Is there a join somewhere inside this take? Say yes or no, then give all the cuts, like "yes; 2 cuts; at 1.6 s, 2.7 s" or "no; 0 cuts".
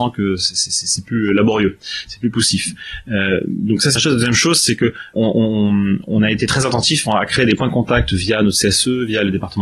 yes; 2 cuts; at 4.0 s, 5.1 s